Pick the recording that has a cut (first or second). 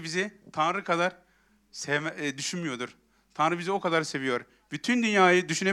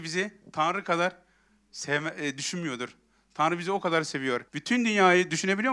second